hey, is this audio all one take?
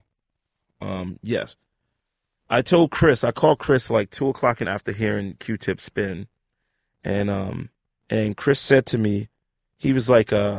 no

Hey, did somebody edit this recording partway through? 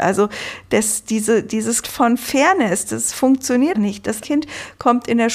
yes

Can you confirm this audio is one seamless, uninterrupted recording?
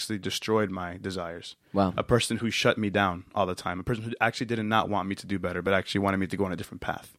yes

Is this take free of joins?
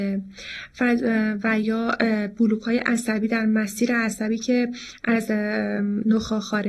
yes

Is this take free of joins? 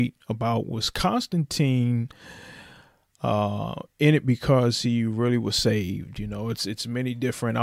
yes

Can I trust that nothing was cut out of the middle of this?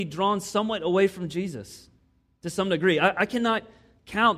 yes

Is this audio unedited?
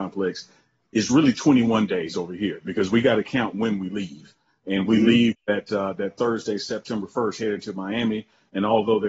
no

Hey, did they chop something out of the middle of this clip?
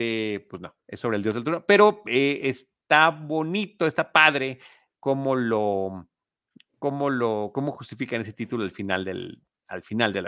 no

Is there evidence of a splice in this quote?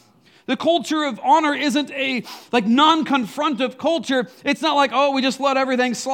no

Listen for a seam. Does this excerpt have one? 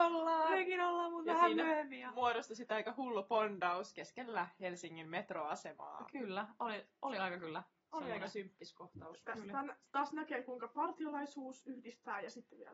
no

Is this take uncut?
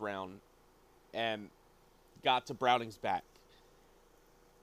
yes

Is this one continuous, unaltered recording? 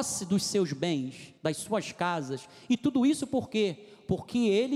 no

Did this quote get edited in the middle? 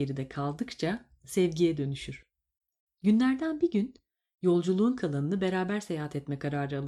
no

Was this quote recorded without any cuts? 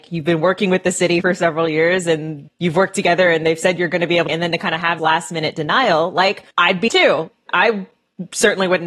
no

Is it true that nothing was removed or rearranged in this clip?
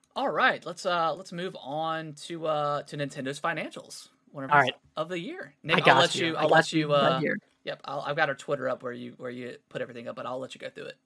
no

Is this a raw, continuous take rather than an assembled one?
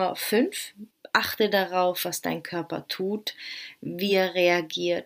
yes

